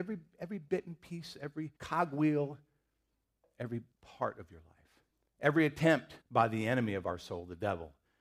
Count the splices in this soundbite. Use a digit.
4